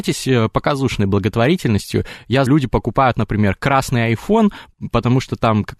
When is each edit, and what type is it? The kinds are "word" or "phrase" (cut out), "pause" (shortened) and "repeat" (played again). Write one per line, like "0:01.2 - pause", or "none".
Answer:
0:02.5 - word